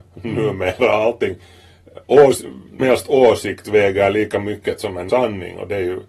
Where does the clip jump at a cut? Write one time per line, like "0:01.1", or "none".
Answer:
0:02.8
0:05.1